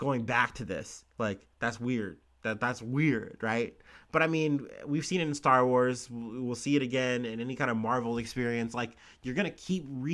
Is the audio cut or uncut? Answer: uncut